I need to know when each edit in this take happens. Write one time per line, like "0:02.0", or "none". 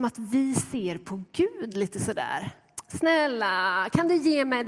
none